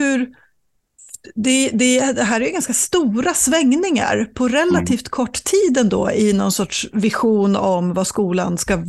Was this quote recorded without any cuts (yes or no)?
yes